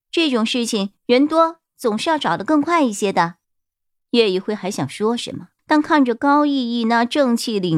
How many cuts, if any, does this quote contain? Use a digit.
3